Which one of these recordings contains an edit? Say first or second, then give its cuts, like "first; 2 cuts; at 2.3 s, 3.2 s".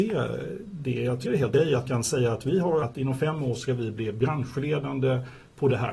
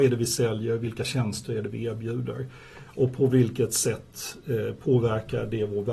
first; 4 cuts; at 1.2 s, 1.5 s, 1.9 s, 2.8 s